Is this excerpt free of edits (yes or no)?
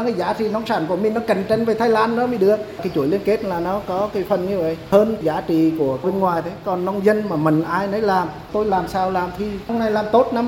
yes